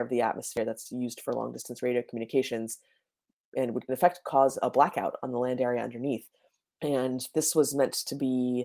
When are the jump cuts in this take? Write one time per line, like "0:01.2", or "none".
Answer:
0:03.9
0:04.6